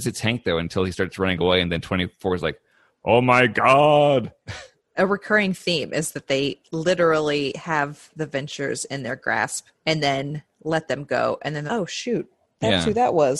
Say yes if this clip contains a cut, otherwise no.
yes